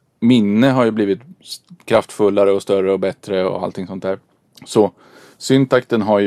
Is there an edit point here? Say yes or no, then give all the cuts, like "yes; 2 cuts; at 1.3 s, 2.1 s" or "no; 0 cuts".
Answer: no; 0 cuts